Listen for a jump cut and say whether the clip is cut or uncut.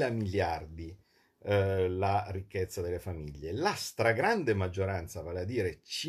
uncut